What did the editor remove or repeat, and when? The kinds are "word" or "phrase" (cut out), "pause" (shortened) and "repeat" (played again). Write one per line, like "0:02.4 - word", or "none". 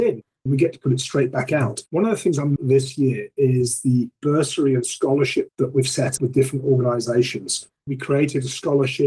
0:01.9 - pause
0:02.6 - phrase
0:05.5 - word
0:06.2 - word